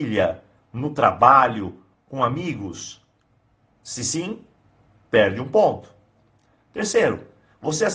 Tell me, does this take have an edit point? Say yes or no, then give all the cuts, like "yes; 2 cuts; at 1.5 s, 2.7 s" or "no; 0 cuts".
no; 0 cuts